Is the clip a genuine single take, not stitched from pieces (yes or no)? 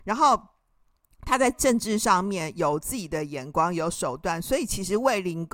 yes